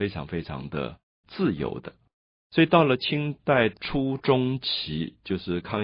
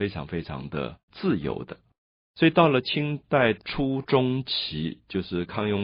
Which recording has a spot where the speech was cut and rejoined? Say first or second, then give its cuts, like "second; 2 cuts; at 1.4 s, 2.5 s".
second; 1 cut; at 1.0 s